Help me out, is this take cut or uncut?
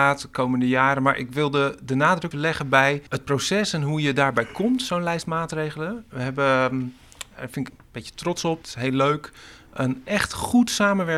cut